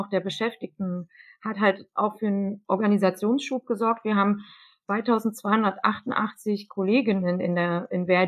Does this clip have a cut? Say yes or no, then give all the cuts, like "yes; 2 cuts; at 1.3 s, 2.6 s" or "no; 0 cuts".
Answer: no; 0 cuts